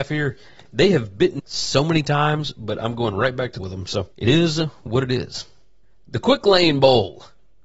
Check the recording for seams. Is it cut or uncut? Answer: cut